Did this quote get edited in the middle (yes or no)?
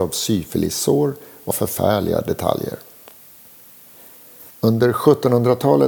yes